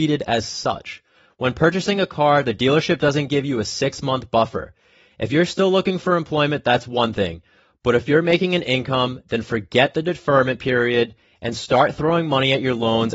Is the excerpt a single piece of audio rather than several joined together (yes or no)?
yes